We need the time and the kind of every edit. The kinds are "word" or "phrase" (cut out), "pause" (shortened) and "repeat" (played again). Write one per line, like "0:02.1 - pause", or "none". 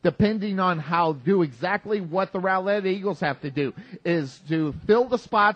0:01.2 - word